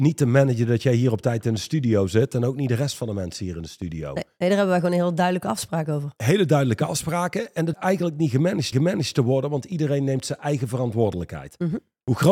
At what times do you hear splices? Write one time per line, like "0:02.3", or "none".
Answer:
0:07.7
0:08.7